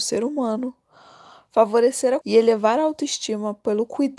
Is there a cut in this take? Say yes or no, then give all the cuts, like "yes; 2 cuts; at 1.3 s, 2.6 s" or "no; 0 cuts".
yes; 1 cut; at 2.2 s